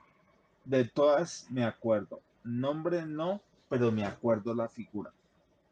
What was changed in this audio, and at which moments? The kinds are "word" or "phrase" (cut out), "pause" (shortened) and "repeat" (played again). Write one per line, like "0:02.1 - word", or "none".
none